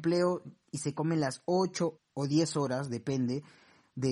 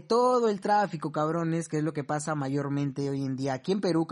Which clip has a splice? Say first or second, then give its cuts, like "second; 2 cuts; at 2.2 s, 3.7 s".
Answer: first; 1 cut; at 1.9 s